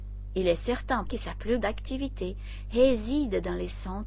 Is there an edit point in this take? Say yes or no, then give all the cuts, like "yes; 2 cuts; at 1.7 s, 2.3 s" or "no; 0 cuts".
yes; 2 cuts; at 1.1 s, 1.6 s